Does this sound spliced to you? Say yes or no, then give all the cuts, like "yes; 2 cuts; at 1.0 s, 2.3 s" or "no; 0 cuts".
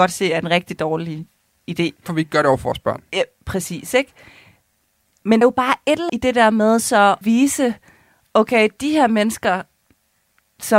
yes; 4 cuts; at 2.1 s, 5.4 s, 6.1 s, 7.2 s